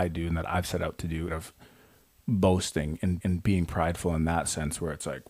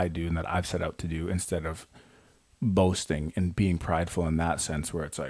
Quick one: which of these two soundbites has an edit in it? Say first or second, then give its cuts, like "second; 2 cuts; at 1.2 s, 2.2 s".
first; 2 cuts; at 1.3 s, 3.2 s